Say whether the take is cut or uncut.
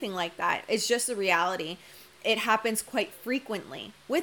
uncut